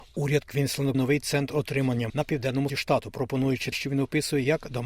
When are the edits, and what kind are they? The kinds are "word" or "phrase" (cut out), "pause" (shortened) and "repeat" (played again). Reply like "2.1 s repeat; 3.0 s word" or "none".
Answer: 0.9 s word; 2.1 s word; 2.7 s word; 3.7 s word